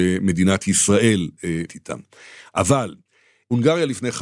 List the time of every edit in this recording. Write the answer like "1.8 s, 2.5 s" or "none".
1.7 s